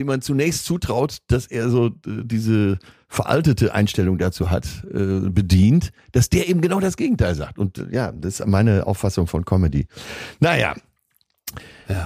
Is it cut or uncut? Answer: uncut